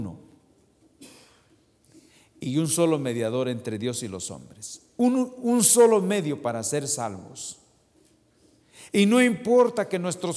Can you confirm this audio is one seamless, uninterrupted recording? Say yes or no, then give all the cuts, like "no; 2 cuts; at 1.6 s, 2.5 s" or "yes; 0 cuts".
yes; 0 cuts